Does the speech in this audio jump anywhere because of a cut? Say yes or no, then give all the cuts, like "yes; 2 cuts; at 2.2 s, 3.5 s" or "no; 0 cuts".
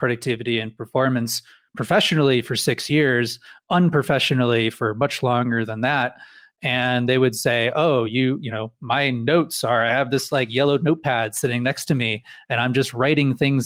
no; 0 cuts